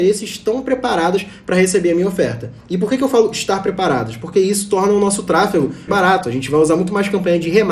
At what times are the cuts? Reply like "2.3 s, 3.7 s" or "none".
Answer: 5.9 s